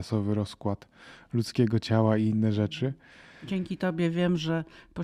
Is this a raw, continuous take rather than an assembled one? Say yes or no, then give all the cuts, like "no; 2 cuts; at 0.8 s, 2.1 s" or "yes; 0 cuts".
yes; 0 cuts